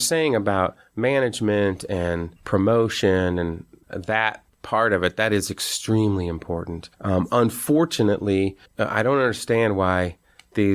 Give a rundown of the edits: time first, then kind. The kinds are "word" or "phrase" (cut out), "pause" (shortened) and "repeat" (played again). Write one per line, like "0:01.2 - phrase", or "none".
0:02.4 - pause
0:06.9 - pause
0:08.7 - pause